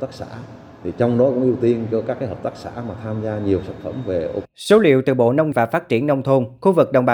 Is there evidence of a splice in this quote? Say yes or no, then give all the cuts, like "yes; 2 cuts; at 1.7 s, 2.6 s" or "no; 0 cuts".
yes; 2 cuts; at 4.4 s, 5.5 s